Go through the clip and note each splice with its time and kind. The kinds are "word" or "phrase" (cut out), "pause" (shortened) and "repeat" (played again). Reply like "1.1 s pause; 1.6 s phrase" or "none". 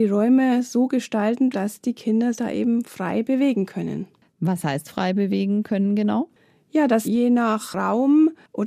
1.5 s word; 2.4 s word; 7.0 s word